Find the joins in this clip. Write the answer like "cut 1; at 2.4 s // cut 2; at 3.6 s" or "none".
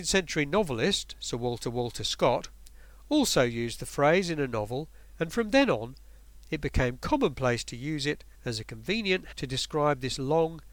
cut 1; at 1.6 s // cut 2; at 8.3 s // cut 3; at 9.3 s